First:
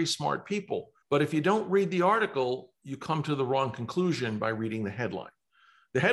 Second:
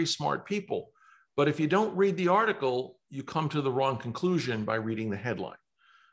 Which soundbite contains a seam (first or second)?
first